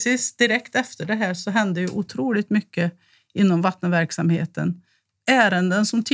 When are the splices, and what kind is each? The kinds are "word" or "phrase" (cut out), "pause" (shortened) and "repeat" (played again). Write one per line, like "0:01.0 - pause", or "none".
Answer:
none